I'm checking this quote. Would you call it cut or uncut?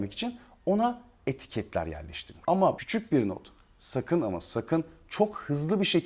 uncut